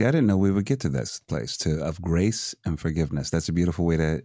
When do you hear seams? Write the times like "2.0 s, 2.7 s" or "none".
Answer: 1.2 s